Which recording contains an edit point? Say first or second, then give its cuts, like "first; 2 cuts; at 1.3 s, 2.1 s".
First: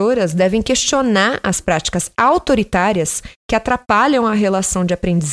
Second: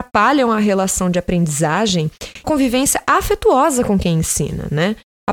second; 1 cut; at 2.4 s